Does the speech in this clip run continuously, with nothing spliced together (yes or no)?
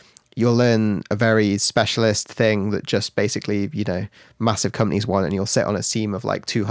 yes